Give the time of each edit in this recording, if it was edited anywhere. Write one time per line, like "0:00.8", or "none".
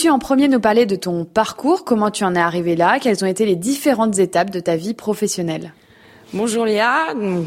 none